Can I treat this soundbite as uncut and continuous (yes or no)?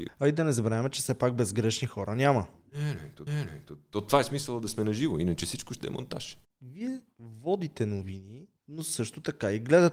no